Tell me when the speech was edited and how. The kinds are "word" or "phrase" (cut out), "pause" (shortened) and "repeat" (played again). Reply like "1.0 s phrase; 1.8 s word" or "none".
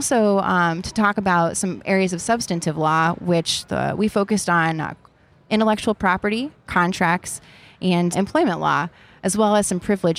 none

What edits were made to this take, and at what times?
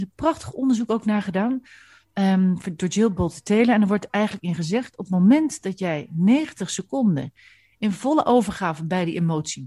none

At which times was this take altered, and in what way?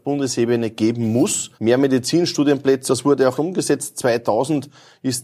1.5 s pause; 2.9 s word; 3.4 s word

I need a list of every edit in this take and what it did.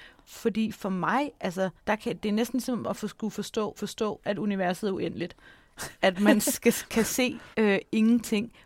1.8 s pause; 3.8 s repeat; 7.5 s pause

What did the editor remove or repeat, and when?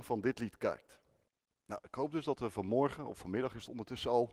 1.3 s pause

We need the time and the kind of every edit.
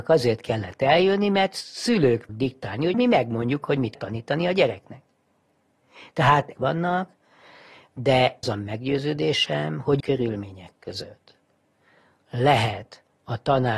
2.3 s word; 2.9 s word; 3.9 s word; 6.5 s phrase; 8.4 s phrase; 10.0 s word

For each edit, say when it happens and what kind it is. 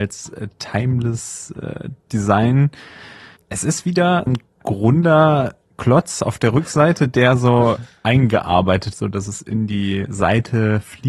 3.4 s pause; 4.3 s word; 5.6 s pause; 8.9 s word

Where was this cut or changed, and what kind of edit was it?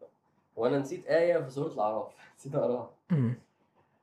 none

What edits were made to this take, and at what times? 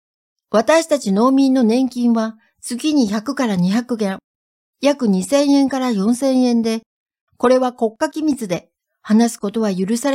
none

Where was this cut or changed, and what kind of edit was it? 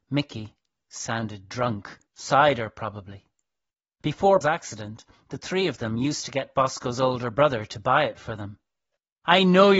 2.1 s pause; 4.4 s word

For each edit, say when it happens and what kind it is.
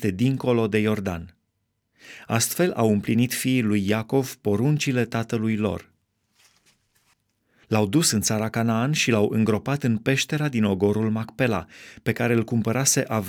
none

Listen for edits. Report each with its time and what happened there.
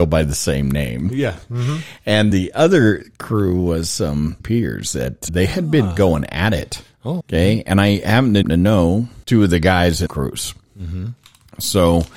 2.3 s word; 4.4 s word; 5.3 s word; 7.2 s word; 8.4 s phrase; 9.2 s pause; 10.1 s phrase

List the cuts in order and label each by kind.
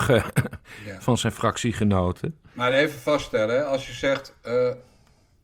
none

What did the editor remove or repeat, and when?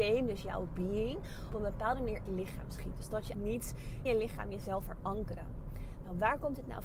1.5 s word; 2.3 s word; 3.3 s word; 4.1 s word; 4.8 s word

